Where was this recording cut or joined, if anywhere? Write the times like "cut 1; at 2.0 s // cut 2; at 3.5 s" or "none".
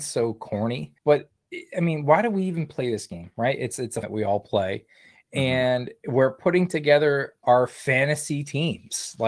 cut 1; at 1.0 s // cut 2; at 4.0 s